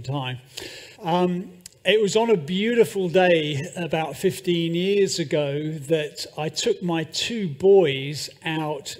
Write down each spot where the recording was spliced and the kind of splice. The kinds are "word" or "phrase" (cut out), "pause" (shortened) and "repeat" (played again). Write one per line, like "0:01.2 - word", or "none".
0:00.9 - pause